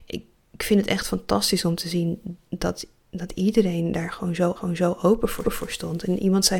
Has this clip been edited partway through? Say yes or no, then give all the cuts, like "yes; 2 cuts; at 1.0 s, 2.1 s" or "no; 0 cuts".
yes; 3 cuts; at 2.5 s, 4.6 s, 5.4 s